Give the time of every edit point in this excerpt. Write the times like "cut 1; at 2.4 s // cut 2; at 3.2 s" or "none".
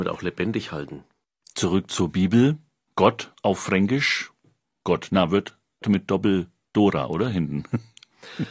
cut 1; at 1.2 s // cut 2; at 4.8 s // cut 3; at 5.8 s